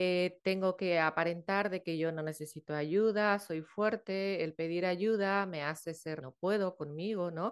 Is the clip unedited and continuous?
no; 1 cut; at 6.2 s

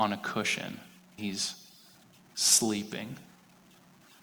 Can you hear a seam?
yes; 1 cut; at 1.2 s

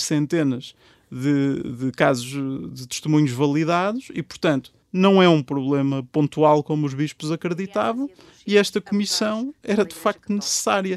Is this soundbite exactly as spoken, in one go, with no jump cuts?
no; 1 cut; at 4.8 s

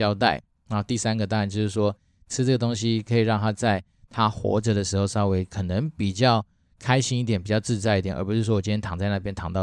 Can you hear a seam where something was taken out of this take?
no; 0 cuts

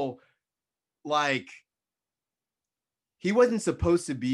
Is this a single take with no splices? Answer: yes; 0 cuts

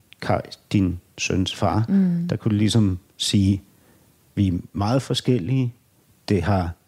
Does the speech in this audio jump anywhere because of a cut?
no; 0 cuts

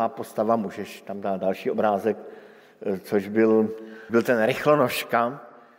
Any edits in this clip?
yes; 1 cut; at 4.1 s

